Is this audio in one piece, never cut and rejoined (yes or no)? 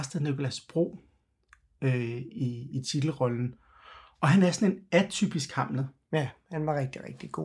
yes